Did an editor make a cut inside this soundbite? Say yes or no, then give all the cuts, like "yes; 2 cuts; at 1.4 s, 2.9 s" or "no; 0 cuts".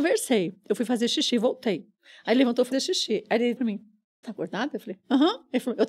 yes; 3 cuts; at 2.7 s, 3.6 s, 4.2 s